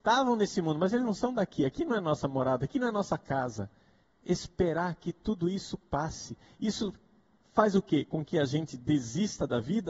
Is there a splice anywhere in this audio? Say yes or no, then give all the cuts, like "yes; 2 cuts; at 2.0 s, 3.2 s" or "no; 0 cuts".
no; 0 cuts